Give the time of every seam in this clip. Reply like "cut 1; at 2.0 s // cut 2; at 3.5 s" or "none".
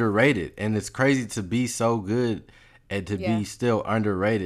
none